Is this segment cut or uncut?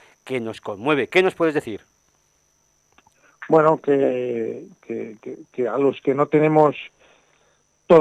uncut